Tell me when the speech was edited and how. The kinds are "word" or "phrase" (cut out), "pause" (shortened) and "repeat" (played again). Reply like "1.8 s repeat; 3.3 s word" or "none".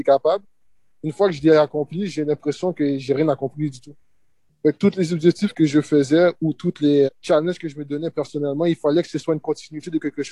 7.1 s word